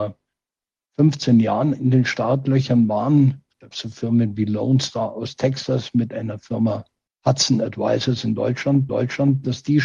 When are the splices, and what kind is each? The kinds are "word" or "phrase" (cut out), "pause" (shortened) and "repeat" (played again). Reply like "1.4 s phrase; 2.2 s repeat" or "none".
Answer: 3.7 s word; 7.1 s pause; 8.9 s repeat